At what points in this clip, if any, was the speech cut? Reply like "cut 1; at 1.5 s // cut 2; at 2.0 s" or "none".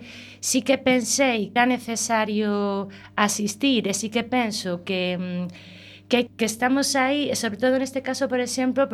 cut 1; at 1.6 s // cut 2; at 6.3 s